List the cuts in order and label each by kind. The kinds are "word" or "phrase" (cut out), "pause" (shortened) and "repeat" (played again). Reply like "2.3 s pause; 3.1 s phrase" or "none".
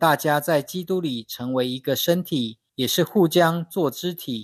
2.7 s pause